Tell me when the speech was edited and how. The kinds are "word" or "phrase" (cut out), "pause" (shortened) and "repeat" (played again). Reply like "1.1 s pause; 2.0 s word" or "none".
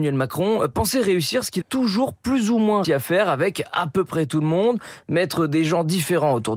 1.6 s word; 2.8 s word